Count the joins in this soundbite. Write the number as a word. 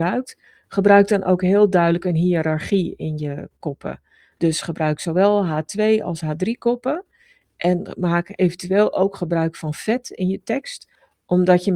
zero